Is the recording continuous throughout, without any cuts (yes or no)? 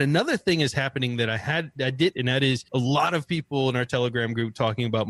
no